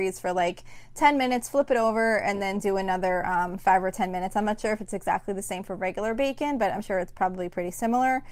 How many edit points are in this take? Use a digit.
0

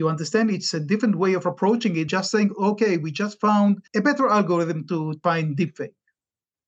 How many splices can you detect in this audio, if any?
2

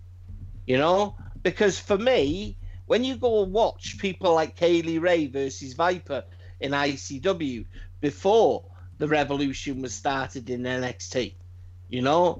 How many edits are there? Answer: 0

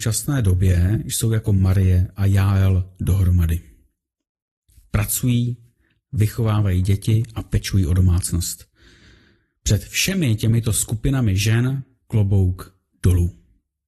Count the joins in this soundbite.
0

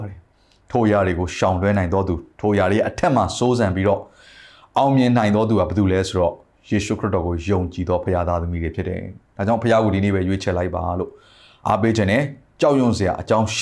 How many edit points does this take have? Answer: 0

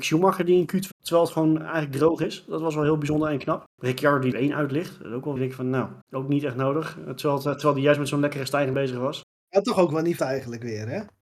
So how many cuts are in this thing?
7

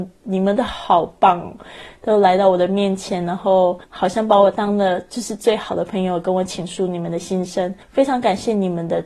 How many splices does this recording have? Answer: 2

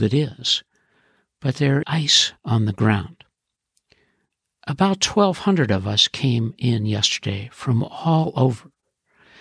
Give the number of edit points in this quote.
2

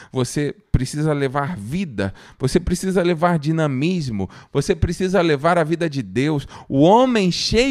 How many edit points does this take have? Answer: 0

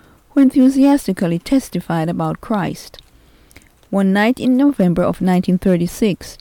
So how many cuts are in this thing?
0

